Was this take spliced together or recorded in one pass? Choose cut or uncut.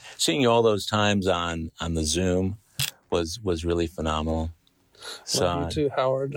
uncut